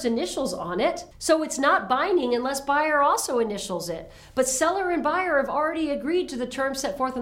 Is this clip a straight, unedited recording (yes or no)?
no